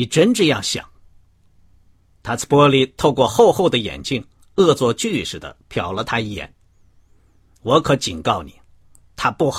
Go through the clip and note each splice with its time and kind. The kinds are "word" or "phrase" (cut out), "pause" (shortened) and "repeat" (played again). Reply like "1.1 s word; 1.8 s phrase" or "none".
none